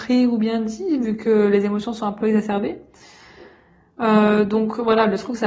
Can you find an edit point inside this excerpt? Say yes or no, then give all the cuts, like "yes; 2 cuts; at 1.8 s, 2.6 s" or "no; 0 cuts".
no; 0 cuts